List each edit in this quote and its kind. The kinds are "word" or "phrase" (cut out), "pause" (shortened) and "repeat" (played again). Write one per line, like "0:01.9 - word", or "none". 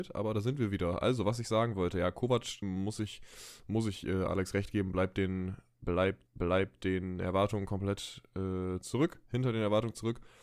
0:02.6 - word
0:06.3 - repeat